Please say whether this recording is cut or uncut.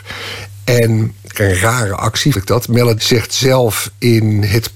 cut